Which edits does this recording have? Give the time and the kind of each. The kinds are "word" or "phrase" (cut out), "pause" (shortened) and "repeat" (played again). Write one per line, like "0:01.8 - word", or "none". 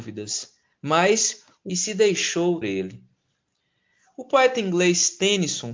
0:01.7 - phrase
0:02.6 - phrase